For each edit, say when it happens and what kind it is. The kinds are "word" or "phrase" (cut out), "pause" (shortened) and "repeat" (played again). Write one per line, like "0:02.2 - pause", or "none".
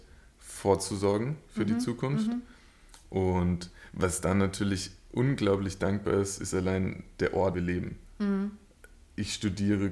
0:07.5 - phrase